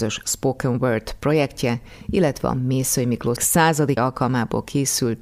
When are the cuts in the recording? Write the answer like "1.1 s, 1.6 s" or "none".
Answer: 3.4 s, 4.0 s